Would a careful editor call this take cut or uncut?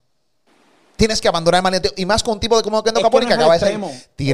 uncut